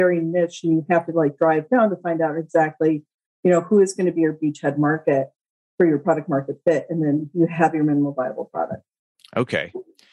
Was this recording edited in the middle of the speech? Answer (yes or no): no